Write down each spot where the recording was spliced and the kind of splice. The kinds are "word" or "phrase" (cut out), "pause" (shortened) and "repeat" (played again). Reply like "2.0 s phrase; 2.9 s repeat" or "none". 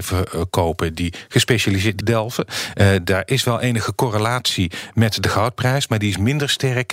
2.0 s word